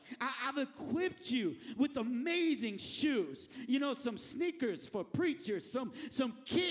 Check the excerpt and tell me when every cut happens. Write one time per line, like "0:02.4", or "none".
none